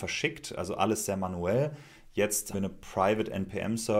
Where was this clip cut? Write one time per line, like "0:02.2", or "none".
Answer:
0:02.5

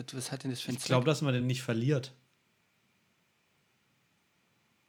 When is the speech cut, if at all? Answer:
none

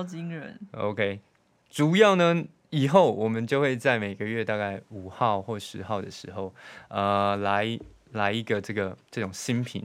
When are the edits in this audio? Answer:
none

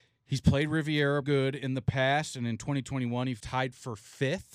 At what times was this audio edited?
0:01.2
0:03.4

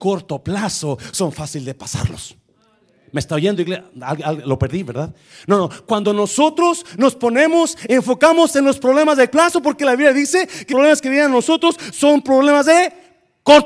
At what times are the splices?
0:09.3
0:10.7

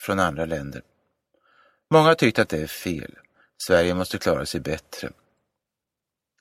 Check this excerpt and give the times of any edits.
none

